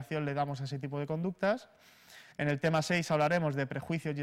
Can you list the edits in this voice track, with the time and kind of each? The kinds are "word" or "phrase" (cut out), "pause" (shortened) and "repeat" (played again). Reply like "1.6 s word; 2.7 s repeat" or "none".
2.3 s pause